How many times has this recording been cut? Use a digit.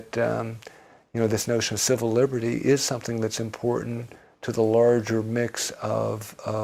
0